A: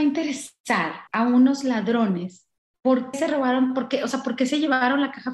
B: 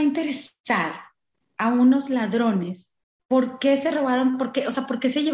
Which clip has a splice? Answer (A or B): A